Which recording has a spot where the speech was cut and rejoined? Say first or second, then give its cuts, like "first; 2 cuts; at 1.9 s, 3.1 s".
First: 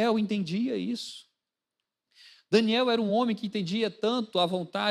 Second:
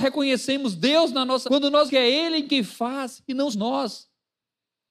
second; 3 cuts; at 1.4 s, 1.9 s, 3.5 s